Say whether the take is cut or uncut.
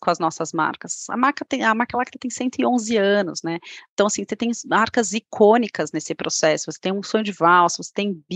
uncut